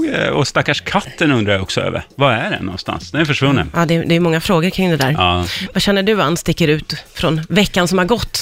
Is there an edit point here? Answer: no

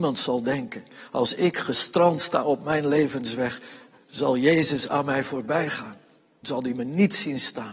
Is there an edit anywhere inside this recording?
yes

